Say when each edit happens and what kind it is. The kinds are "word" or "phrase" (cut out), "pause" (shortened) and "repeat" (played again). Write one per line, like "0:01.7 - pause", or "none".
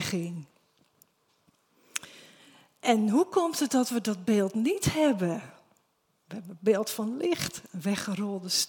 none